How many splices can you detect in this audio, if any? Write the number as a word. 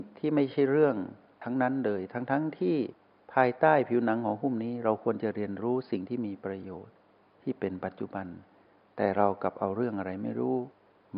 zero